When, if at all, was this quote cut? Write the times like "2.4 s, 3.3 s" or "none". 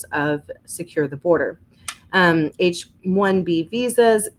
3.0 s